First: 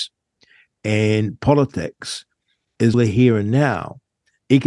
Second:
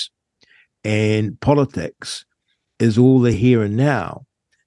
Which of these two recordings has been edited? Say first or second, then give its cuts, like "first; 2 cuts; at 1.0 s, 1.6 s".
first; 1 cut; at 2.9 s